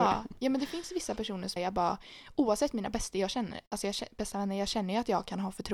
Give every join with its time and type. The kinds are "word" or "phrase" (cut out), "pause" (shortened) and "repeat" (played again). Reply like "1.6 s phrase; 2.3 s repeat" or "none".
1.6 s phrase

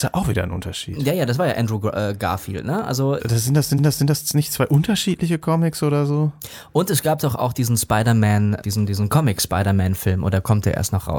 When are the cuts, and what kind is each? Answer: 3.2 s phrase; 3.8 s repeat; 8.6 s word

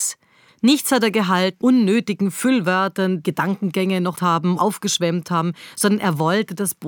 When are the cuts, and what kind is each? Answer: 1.6 s word; 3.2 s word; 4.1 s word; 4.6 s word

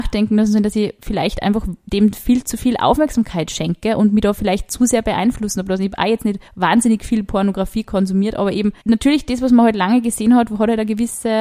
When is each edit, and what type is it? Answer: 6.5 s pause; 8.8 s pause

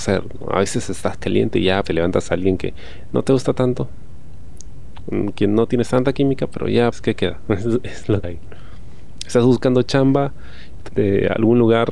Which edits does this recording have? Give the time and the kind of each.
1.8 s word; 6.9 s word; 8.2 s word; 10.9 s word

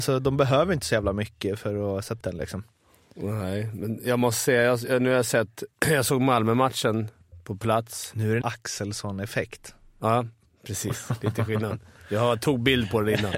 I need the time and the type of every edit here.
2.2 s word; 8.4 s phrase

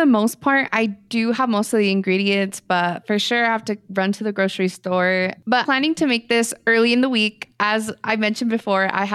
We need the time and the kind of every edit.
5.7 s word

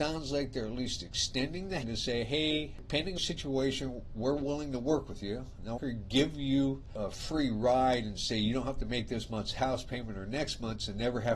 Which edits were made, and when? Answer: 1.8 s word; 3.2 s phrase; 5.8 s phrase

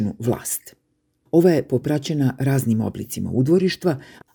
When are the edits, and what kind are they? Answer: 1.8 s word

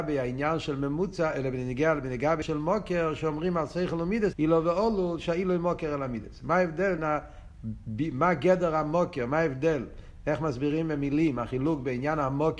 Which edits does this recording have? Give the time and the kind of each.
2.4 s word; 4.3 s word; 7.0 s word

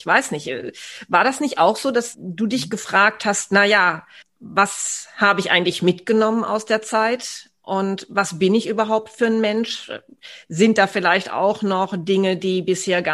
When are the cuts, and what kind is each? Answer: 2.1 s phrase; 4.2 s pause

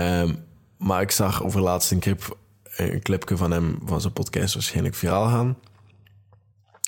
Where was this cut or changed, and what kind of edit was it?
none

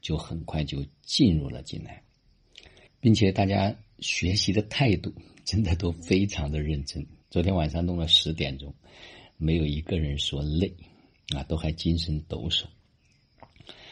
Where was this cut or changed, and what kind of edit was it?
2.9 s pause; 7.2 s pause

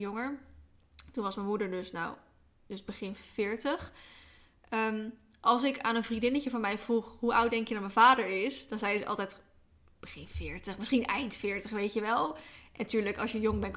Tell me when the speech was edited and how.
none

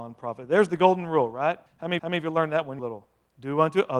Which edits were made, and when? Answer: 1.7 s pause; 2.0 s repeat; 2.8 s phrase

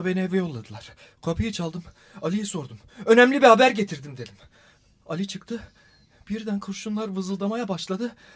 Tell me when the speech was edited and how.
none

